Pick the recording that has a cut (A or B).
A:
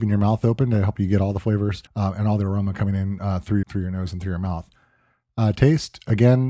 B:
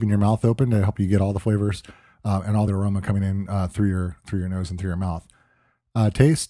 A